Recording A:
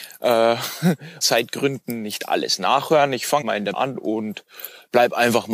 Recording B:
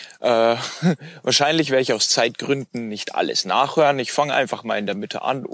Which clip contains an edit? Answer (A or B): A